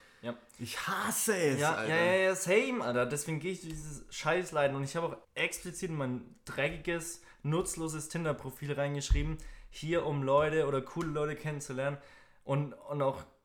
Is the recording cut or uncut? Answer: cut